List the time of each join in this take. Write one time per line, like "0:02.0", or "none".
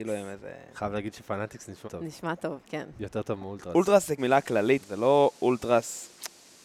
0:01.8
0:04.2
0:04.8